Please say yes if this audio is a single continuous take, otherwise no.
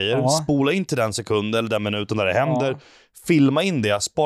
yes